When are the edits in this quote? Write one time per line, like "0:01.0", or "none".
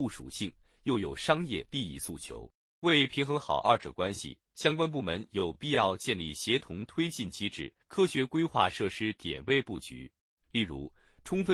0:04.4
0:07.8
0:10.2